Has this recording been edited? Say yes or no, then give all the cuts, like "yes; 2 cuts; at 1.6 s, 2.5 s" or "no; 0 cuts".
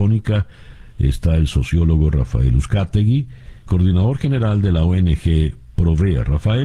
yes; 1 cut; at 3.7 s